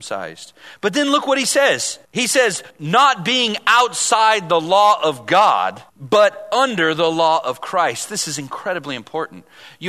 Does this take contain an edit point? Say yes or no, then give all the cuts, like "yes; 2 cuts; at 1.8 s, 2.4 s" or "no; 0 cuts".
yes; 3 cuts; at 2.0 s, 2.7 s, 5.9 s